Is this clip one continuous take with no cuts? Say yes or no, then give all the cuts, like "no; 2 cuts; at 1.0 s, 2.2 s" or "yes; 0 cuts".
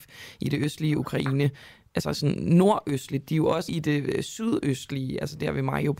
no; 1 cut; at 3.7 s